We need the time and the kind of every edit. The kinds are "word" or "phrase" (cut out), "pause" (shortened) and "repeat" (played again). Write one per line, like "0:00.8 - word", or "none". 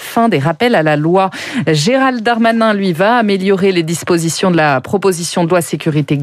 none

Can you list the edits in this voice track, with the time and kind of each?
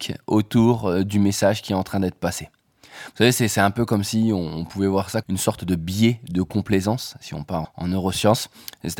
0:05.2 - word
0:07.6 - word

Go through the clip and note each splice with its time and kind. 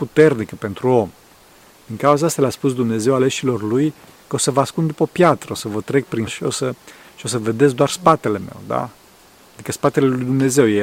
0:06.3 - word

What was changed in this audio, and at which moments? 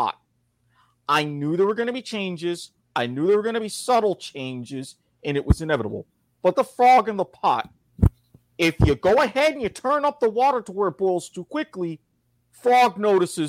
0:06.5 - word

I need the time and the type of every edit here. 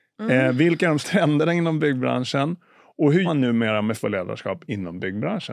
0:01.0 - word
0:03.2 - word
0:04.0 - word

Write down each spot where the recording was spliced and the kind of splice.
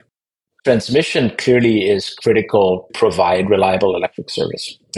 0:02.9 - word

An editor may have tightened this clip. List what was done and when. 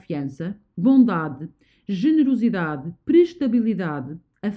none

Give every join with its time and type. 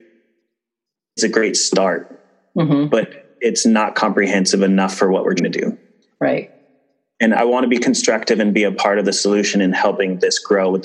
0:01.2 - word
0:05.4 - word
0:07.3 - word

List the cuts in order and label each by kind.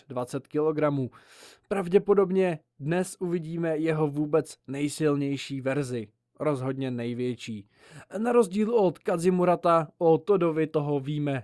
none

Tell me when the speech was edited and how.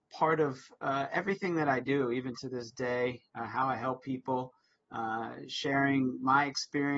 none

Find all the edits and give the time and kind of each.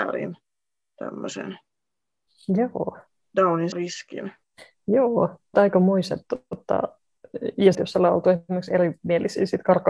0:03.7 - word
0:05.5 - word
0:07.7 - phrase

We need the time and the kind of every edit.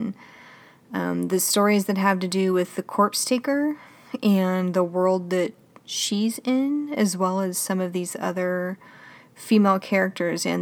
none

